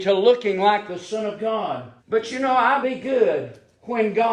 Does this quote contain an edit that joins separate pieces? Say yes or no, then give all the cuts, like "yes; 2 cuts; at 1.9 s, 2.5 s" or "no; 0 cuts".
yes; 2 cuts; at 2.0 s, 2.8 s